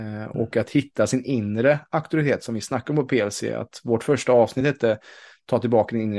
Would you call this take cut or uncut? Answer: uncut